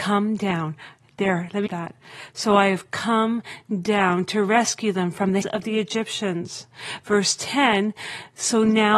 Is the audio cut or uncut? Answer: cut